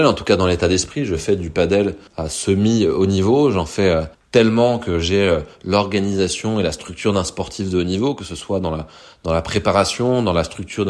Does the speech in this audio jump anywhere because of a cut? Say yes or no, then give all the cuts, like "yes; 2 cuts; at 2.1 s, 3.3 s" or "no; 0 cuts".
yes; 2 cuts; at 2.1 s, 4.1 s